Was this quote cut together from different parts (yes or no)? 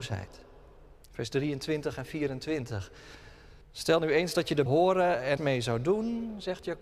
yes